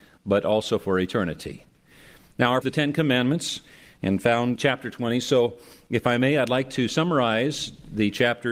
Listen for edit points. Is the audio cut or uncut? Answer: cut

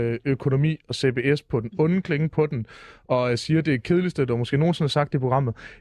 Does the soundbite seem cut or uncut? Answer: uncut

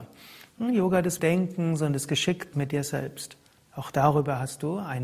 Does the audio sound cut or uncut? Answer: cut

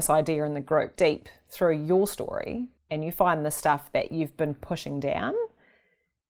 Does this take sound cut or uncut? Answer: cut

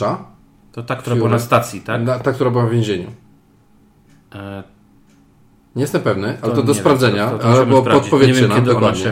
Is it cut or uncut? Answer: uncut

